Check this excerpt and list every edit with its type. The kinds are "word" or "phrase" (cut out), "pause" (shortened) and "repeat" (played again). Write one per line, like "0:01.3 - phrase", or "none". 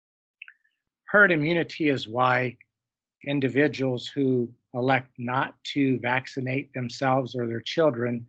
none